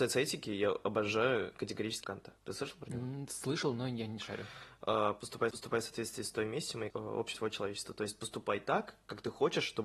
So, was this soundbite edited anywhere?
yes; 5 cuts; at 2.0 s, 2.4 s, 5.5 s, 6.9 s, 7.3 s

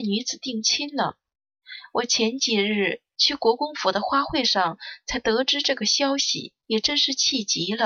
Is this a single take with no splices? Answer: no; 1 cut; at 6.6 s

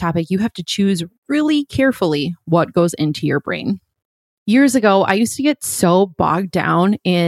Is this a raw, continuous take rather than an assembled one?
yes; 0 cuts

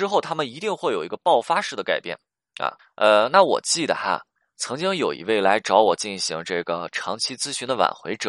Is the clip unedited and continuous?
no; 1 cut; at 2.8 s

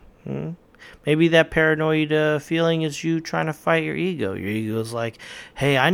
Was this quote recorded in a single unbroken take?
yes; 0 cuts

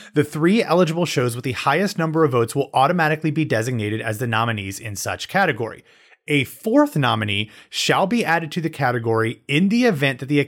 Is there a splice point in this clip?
no; 0 cuts

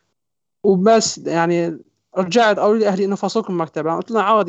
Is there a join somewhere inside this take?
no; 0 cuts

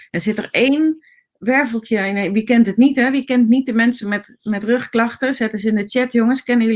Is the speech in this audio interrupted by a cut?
no; 0 cuts

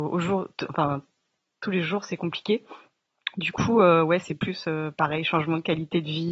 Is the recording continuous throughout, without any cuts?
yes; 0 cuts

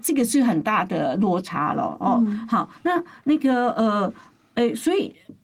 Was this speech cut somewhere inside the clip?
no; 0 cuts

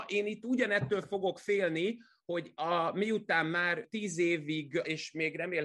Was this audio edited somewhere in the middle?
no; 0 cuts

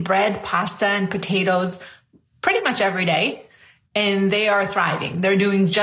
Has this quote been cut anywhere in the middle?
no; 0 cuts

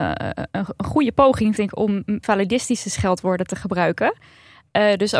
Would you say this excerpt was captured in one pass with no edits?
no; 2 cuts; at 1.6 s, 2.2 s

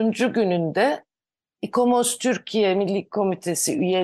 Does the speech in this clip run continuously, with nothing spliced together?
yes; 0 cuts

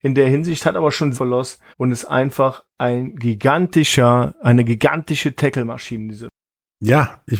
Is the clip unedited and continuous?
no; 2 cuts; at 1.1 s, 1.7 s

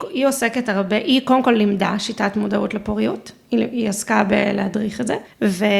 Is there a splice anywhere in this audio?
no; 0 cuts

